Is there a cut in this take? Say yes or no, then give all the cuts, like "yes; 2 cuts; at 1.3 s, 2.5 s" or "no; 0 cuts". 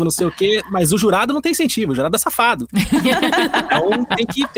no; 0 cuts